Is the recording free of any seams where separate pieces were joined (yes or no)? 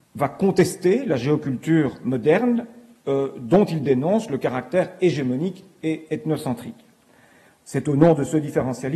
yes